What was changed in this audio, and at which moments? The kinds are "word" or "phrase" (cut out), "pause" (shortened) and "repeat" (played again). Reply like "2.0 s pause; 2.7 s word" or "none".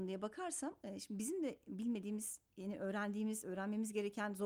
2.5 s pause